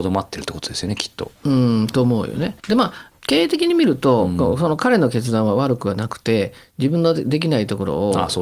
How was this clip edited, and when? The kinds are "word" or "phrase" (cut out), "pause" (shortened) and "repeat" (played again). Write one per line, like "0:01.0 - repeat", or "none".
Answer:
0:01.4 - pause
0:02.6 - pause